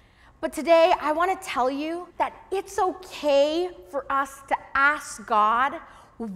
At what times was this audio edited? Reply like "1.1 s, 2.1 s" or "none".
2.1 s